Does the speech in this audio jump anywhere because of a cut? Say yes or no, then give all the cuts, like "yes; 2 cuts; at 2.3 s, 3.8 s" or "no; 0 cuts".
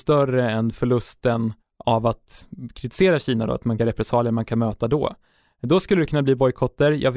yes; 2 cuts; at 1.6 s, 3.8 s